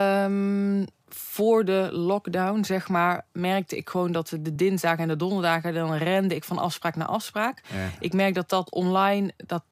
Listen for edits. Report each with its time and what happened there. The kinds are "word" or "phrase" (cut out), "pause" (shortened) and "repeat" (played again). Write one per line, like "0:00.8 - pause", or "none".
none